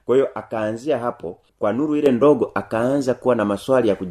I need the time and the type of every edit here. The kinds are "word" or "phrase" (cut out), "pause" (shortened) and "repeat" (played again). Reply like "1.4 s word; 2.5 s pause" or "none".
1.5 s pause